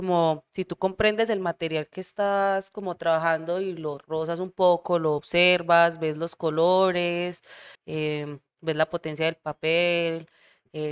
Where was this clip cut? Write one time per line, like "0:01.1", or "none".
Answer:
0:07.7